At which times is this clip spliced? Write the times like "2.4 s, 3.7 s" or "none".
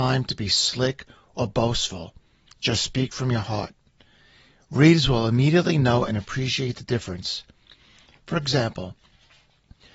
none